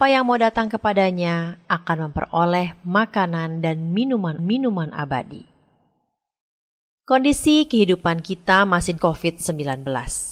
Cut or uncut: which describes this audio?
cut